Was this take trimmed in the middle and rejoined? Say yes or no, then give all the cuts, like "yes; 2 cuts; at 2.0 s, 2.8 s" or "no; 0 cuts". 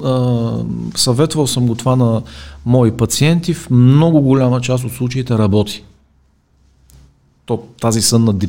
no; 0 cuts